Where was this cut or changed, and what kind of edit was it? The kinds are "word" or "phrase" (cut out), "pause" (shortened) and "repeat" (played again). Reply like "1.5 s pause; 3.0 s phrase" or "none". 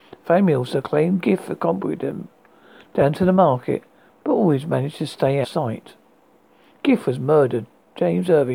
5.4 s phrase